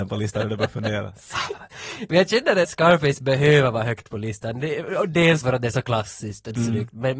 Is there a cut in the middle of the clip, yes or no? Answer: yes